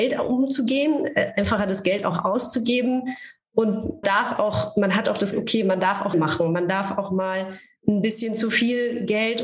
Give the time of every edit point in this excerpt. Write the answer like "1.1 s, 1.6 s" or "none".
4.0 s, 5.3 s, 6.1 s

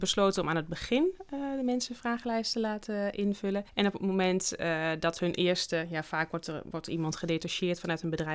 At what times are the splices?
3.7 s

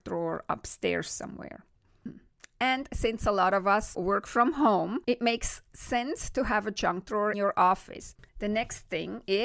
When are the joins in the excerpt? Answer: 3.9 s, 5.0 s, 5.7 s, 7.3 s, 8.3 s

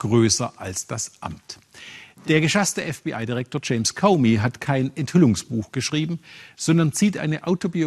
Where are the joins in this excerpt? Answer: none

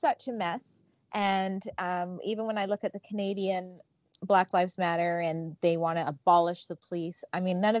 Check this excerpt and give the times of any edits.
none

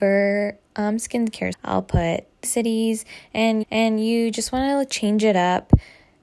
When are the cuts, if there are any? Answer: 1.5 s, 2.4 s, 3.6 s

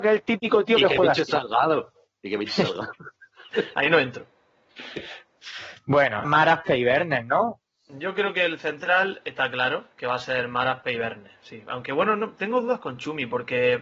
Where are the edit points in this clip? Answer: 6.2 s, 9.9 s

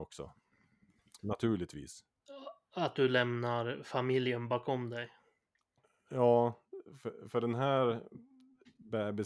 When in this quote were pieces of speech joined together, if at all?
none

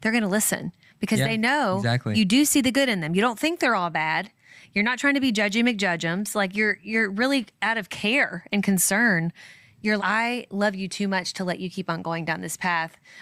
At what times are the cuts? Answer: 10.0 s

